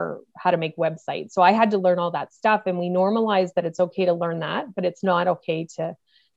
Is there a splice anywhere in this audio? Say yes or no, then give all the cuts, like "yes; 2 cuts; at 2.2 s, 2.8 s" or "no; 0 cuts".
no; 0 cuts